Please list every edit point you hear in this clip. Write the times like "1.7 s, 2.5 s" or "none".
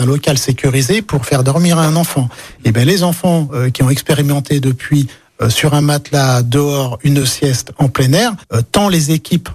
none